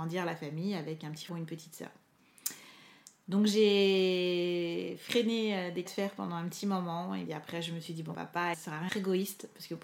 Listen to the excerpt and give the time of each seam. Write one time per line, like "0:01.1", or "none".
0:01.3
0:05.9
0:07.3
0:08.1
0:08.5
0:08.9